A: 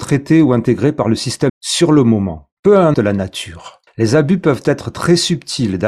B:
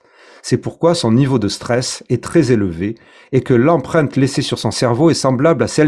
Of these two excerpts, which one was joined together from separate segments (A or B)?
A